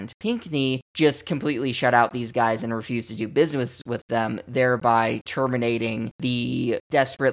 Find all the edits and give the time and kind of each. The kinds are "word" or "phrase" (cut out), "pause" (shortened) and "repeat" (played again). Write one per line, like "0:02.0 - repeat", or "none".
none